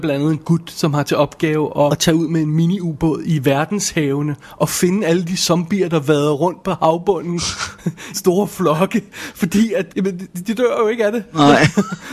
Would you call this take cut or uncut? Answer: cut